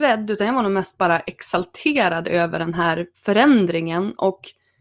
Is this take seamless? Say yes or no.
no